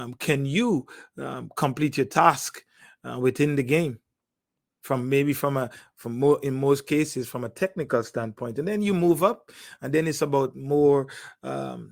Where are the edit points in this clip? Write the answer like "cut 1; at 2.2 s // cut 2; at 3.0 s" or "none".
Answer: cut 1; at 4.6 s